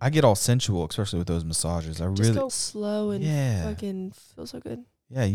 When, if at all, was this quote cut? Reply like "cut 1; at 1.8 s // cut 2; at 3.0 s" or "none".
cut 1; at 2.5 s